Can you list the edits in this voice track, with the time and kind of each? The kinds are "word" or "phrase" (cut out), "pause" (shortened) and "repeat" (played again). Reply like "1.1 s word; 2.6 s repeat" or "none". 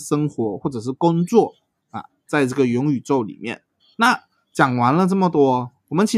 3.8 s pause